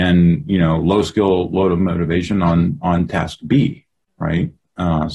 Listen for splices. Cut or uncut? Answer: uncut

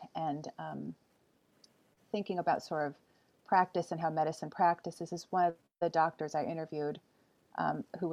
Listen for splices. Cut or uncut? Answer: uncut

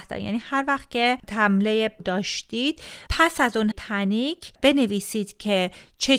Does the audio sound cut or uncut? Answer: cut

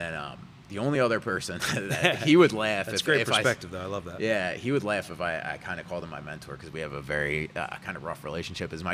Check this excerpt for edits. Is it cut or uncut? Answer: uncut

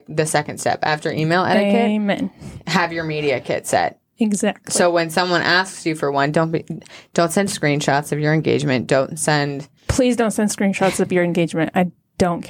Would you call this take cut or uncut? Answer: cut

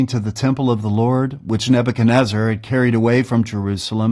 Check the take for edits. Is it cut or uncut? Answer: uncut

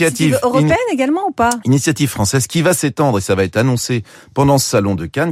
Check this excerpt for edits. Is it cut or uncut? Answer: uncut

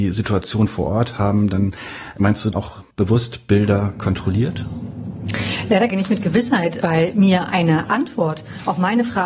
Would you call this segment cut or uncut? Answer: cut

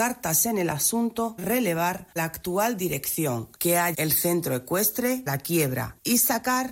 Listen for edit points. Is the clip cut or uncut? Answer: cut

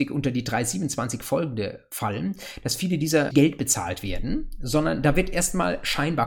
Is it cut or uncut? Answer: cut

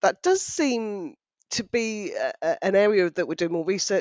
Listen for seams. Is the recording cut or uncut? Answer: uncut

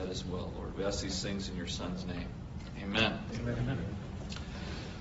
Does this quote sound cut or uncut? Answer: uncut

